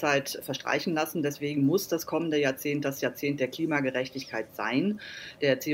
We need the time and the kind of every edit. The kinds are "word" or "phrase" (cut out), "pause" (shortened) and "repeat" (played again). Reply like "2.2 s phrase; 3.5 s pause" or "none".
none